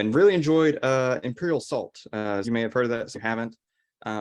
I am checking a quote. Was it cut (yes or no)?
yes